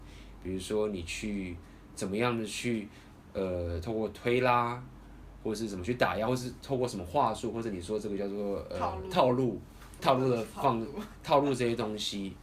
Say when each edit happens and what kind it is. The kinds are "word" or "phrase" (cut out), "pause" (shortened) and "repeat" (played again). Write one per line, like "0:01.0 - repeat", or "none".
0:10.0 - word